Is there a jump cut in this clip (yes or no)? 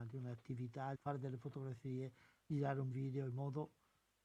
yes